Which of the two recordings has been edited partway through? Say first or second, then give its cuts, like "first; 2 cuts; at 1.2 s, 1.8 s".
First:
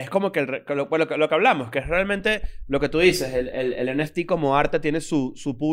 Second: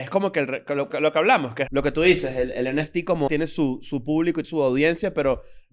second; 5 cuts; at 0.9 s, 1.7 s, 2.5 s, 3.3 s, 4.4 s